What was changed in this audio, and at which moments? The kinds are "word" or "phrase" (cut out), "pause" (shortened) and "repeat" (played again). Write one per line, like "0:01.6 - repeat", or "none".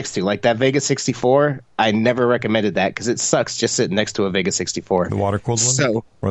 none